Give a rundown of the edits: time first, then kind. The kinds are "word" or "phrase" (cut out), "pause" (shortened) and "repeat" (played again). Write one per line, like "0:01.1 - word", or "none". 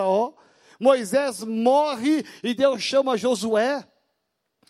none